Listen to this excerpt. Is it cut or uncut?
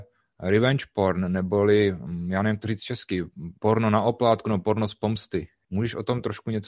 cut